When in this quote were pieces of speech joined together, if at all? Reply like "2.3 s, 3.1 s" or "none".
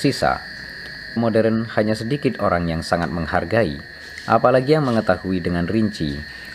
1.2 s